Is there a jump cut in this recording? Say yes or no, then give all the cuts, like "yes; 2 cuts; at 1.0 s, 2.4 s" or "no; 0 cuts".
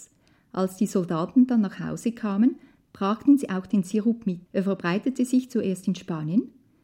yes; 1 cut; at 4.5 s